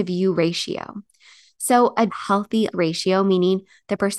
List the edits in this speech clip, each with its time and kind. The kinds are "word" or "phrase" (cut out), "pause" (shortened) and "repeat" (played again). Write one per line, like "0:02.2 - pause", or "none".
0:02.1 - phrase
0:02.7 - word